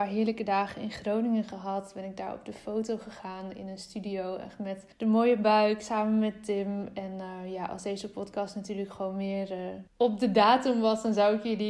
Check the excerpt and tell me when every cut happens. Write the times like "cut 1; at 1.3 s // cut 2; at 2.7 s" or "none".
cut 1; at 4.9 s // cut 2; at 9.9 s